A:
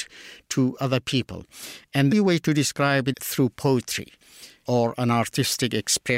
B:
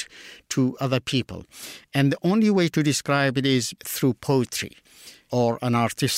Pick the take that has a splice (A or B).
A